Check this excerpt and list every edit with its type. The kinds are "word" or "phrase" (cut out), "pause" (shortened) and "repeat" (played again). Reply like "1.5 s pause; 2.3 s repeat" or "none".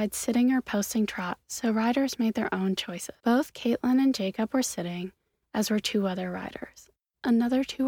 3.2 s pause